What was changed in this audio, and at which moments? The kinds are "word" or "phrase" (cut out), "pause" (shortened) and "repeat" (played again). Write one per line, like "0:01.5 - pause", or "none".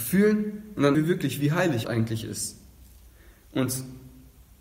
0:00.9 - word
0:01.8 - word